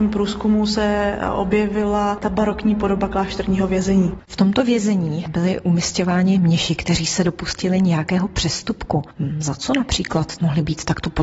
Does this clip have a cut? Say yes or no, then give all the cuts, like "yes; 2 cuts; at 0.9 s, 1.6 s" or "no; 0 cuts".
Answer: no; 0 cuts